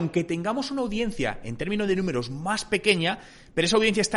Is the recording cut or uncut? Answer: uncut